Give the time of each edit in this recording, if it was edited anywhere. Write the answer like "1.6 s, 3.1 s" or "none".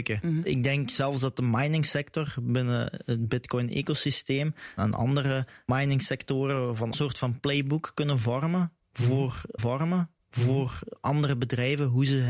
4.8 s, 6.9 s, 9.6 s